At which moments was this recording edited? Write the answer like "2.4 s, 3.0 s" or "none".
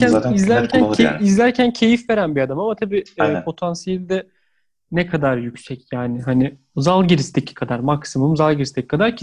none